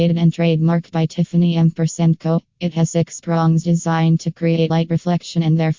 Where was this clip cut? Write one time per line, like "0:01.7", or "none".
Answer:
0:04.7